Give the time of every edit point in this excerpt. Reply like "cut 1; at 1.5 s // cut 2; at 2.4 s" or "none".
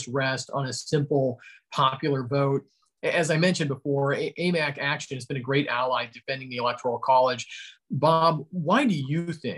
none